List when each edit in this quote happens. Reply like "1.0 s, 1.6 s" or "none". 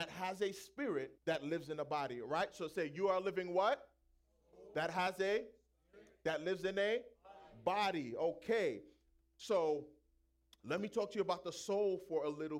1.2 s